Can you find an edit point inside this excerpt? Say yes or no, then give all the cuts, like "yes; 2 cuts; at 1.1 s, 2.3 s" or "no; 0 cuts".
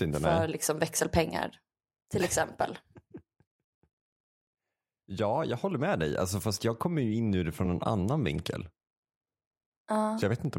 no; 0 cuts